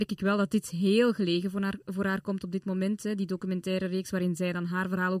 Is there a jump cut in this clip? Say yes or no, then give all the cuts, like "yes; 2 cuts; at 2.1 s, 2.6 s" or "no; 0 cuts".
no; 0 cuts